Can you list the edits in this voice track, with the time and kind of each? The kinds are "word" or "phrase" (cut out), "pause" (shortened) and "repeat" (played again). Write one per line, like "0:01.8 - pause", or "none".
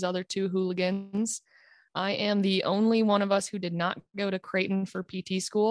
none